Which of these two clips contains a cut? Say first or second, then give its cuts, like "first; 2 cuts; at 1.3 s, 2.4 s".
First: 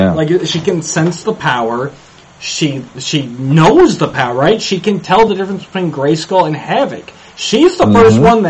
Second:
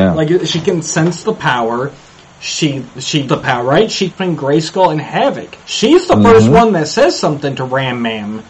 second; 3 cuts; at 3.3 s, 4.1 s, 5.6 s